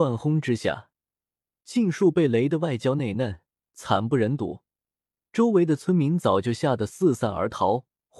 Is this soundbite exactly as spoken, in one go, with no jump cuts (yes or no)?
yes